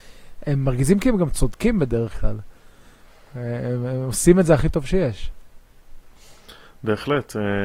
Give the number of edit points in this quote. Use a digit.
0